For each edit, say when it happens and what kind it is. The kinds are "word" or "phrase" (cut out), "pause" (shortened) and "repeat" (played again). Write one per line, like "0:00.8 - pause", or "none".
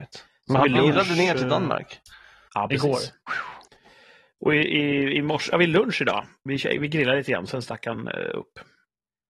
none